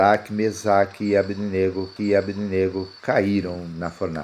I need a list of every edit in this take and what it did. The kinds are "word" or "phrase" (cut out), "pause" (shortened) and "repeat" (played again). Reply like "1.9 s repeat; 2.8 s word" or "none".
2.0 s repeat